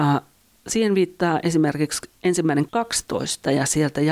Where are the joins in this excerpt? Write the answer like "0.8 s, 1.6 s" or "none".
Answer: 2.7 s